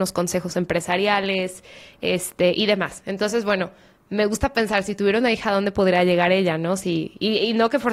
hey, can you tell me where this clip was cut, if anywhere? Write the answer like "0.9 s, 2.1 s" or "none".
none